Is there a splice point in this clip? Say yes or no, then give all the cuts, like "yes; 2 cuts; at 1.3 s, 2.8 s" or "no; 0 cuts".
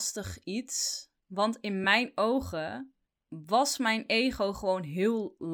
no; 0 cuts